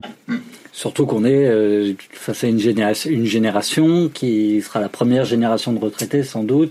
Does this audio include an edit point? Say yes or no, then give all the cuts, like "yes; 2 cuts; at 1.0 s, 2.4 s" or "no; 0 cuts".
no; 0 cuts